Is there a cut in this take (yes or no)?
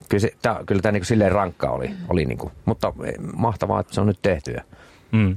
yes